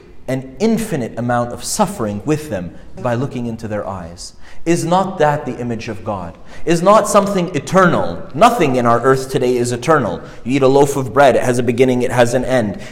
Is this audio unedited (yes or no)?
no